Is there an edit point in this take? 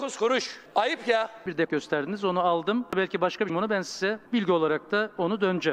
yes; 3 cuts; at 1.7 s, 3.5 s, 4.3 s

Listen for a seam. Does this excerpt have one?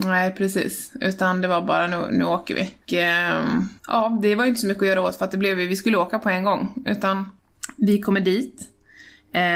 yes; 2 cuts; at 2.8 s, 3.8 s

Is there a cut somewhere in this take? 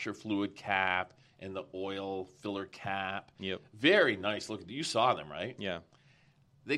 no; 0 cuts

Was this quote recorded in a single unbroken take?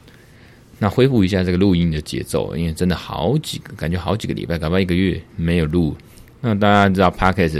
no; 1 cut; at 5.3 s

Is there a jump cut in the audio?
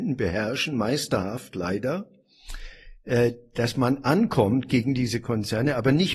yes; 1 cut; at 3.7 s

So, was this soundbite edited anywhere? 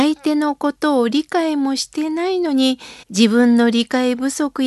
yes; 1 cut; at 3.0 s

